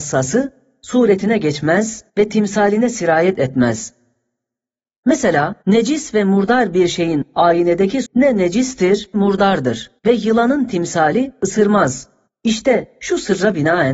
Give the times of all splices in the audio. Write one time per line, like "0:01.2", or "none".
0:02.1
0:05.6
0:08.0
0:09.1
0:10.0
0:12.3